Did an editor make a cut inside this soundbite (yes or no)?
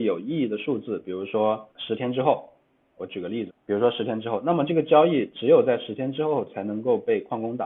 yes